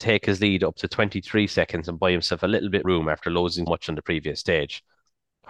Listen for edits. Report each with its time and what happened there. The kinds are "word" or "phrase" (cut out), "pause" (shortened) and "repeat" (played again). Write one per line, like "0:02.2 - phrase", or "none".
0:02.8 - word
0:03.7 - word